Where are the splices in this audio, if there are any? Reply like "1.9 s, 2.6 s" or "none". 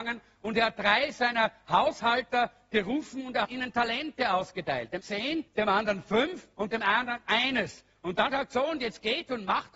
3.4 s, 5.0 s, 5.5 s, 6.5 s, 8.3 s